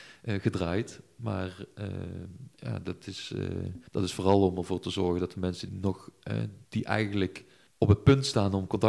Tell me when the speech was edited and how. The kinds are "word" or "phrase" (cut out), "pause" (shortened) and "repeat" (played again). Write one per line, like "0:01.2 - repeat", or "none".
0:02.5 - pause
0:03.9 - pause
0:05.7 - word
0:06.7 - pause
0:07.7 - pause